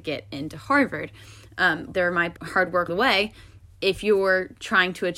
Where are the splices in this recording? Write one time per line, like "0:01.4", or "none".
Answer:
0:01.9
0:02.4
0:02.9
0:03.8